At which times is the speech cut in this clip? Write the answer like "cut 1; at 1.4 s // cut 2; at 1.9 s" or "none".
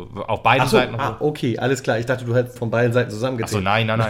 cut 1; at 2.6 s